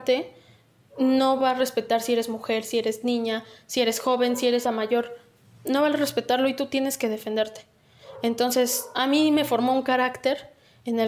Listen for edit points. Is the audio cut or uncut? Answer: cut